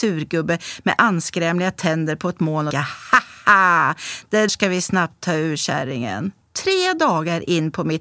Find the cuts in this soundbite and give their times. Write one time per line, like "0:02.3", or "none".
0:02.7
0:04.5
0:06.4